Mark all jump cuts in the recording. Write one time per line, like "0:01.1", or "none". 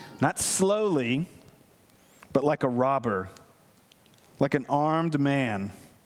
none